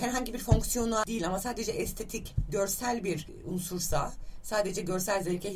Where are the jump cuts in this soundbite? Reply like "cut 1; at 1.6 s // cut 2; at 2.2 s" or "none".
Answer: none